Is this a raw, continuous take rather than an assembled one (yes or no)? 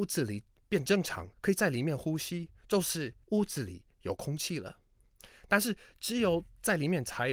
no